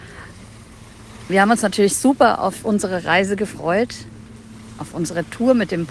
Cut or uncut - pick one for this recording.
uncut